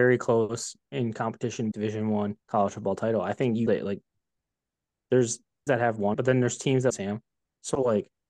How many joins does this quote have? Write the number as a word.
six